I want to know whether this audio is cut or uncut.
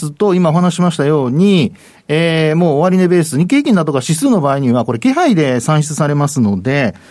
uncut